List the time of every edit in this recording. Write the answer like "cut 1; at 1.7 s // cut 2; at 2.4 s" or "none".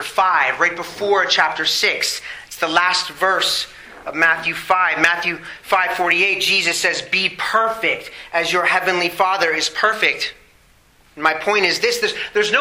none

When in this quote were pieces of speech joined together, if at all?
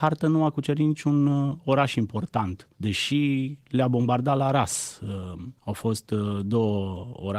cut 1; at 2.7 s // cut 2; at 5.6 s

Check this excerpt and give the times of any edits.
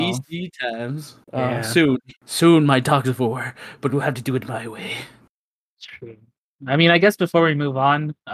cut 1; at 1.2 s // cut 2; at 2.2 s

